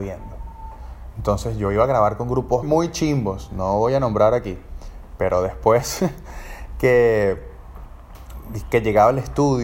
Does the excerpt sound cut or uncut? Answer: cut